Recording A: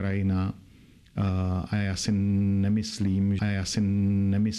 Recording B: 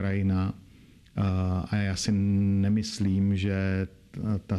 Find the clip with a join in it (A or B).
A